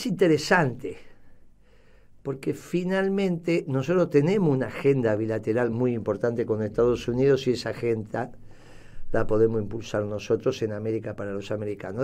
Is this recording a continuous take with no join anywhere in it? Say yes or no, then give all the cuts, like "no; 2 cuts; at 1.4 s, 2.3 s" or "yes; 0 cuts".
yes; 0 cuts